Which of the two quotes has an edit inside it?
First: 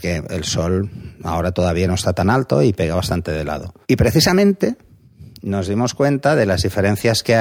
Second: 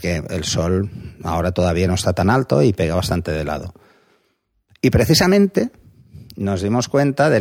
first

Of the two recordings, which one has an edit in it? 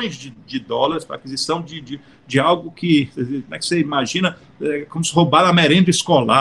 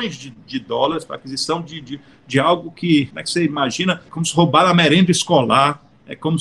second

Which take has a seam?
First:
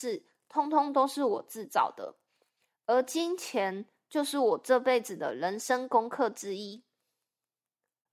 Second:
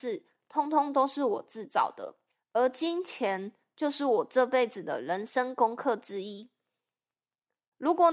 second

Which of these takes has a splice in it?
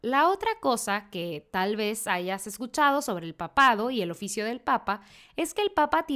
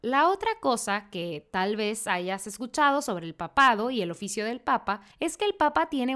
second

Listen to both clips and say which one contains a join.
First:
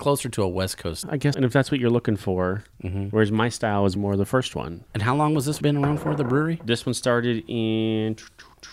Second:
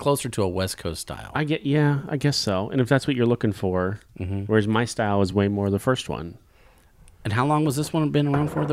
first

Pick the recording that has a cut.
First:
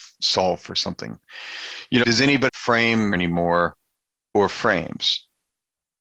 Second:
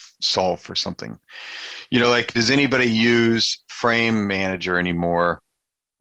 first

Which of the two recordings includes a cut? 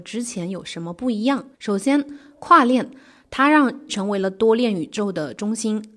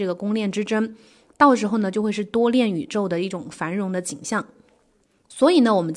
first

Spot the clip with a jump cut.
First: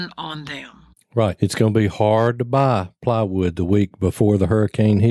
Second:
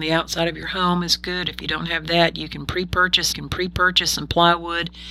second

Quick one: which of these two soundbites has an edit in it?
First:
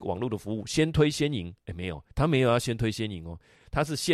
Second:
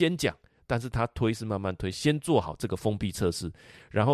first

